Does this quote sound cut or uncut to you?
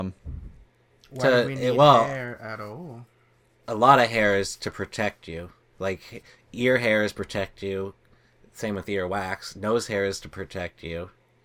uncut